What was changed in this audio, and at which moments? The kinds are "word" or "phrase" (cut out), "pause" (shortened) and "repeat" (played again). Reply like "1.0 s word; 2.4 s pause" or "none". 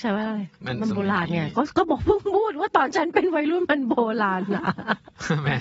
none